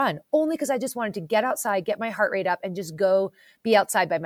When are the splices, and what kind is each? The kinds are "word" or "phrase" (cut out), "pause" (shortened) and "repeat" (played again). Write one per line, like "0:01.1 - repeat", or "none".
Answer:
none